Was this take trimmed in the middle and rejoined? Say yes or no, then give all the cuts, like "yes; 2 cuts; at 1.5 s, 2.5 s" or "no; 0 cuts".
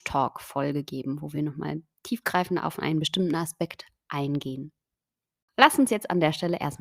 no; 0 cuts